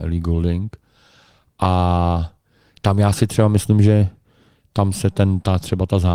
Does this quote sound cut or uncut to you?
uncut